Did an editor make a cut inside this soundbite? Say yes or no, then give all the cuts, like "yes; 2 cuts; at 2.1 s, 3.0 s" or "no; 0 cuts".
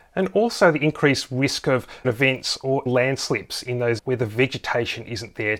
yes; 3 cuts; at 2.0 s, 2.9 s, 4.0 s